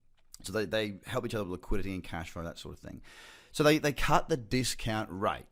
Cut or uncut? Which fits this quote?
uncut